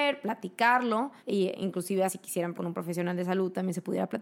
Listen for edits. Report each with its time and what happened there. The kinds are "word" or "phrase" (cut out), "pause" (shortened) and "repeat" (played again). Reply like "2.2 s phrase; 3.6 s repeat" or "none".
1.2 s pause; 2.1 s word; 2.5 s word

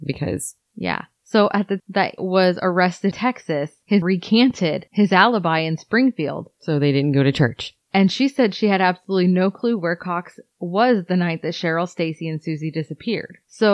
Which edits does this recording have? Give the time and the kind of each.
1.8 s word; 2.2 s word; 3.1 s word; 4.0 s word

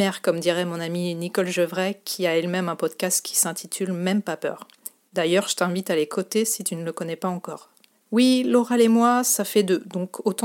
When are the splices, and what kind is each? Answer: 7.9 s pause

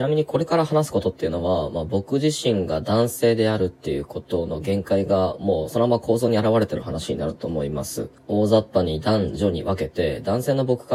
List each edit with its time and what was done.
8.2 s pause

